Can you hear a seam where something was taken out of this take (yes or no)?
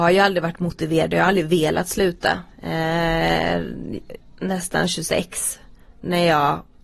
yes